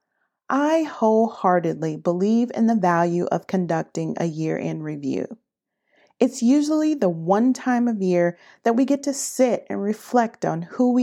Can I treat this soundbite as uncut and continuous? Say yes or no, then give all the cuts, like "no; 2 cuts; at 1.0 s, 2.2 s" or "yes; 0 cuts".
yes; 0 cuts